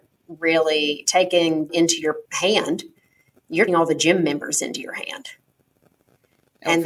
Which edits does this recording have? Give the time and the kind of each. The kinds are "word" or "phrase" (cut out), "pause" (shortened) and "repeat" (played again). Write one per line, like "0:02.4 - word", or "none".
0:01.0 - word
0:01.7 - phrase
0:02.2 - pause
0:03.7 - word